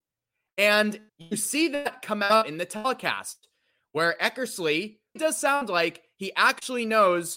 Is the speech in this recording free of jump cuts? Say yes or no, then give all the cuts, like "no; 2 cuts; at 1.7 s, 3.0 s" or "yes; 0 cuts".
no; 2 cuts; at 1.1 s, 5.2 s